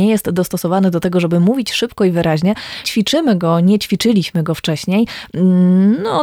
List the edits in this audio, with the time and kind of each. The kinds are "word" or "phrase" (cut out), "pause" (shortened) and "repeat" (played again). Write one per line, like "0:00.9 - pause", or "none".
0:02.8 - word